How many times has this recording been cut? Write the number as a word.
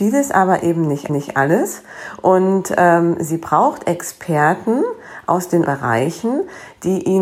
two